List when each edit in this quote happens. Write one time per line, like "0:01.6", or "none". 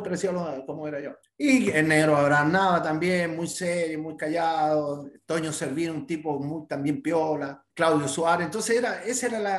0:01.2
0:07.7